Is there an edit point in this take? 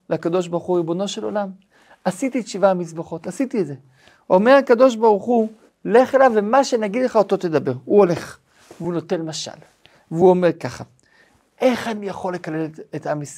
no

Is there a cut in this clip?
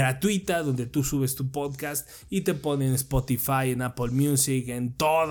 no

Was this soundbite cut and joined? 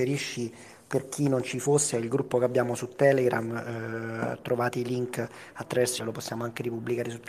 yes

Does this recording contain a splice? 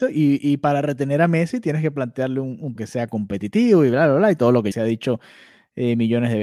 yes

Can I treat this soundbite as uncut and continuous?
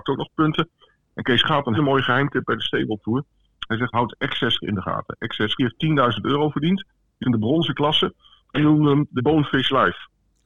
no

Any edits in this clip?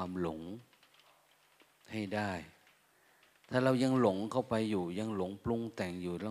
no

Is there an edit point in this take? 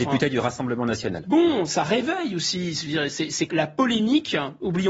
yes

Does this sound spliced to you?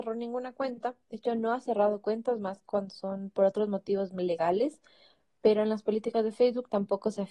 no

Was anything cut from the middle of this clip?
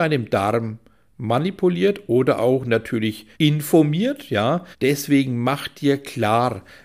yes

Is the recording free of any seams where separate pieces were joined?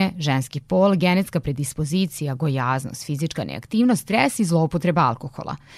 yes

